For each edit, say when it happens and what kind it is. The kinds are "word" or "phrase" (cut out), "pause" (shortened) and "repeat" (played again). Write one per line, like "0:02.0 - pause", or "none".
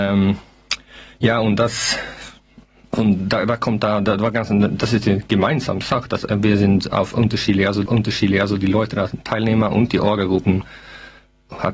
0:07.9 - repeat